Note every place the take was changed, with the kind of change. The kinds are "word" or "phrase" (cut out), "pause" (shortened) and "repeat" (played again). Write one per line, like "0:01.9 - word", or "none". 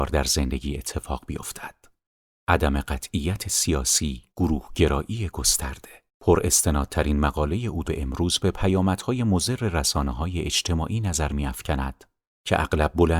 0:02.0 - pause
0:04.3 - pause
0:06.1 - pause
0:07.8 - word